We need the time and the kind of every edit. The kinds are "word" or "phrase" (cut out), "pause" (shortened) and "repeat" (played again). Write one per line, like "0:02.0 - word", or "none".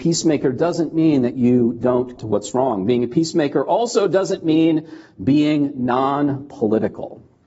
0:02.2 - word